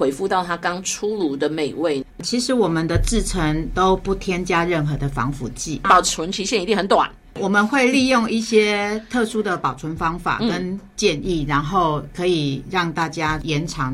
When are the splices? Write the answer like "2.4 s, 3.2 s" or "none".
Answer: 2.1 s